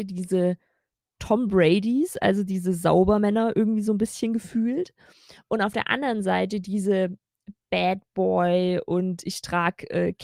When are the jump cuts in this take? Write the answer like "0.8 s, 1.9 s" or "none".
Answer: none